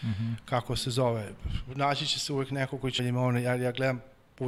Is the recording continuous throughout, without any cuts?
no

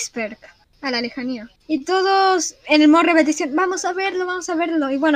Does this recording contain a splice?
yes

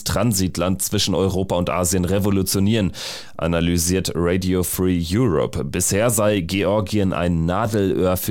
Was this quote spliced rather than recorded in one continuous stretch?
no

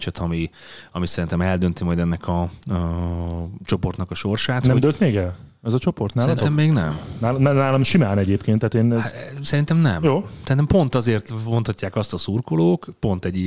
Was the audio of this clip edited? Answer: no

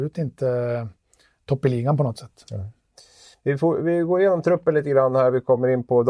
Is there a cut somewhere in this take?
no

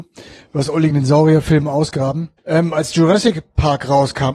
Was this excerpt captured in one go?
no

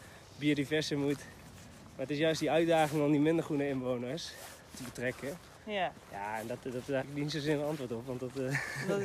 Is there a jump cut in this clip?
yes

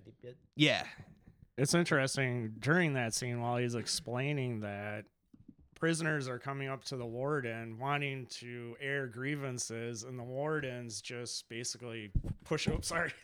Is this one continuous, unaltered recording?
yes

